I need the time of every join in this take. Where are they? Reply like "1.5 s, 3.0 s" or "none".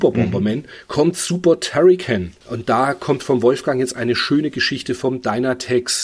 none